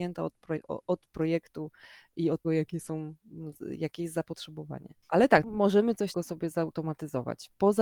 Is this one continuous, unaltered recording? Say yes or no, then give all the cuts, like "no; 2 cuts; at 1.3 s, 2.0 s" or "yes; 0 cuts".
no; 4 cuts; at 2.4 s, 5.0 s, 5.4 s, 6.1 s